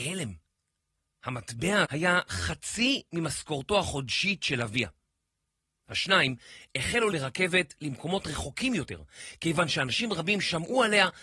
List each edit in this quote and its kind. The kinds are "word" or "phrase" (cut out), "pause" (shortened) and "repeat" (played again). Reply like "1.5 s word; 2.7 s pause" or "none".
1.8 s word; 7.1 s word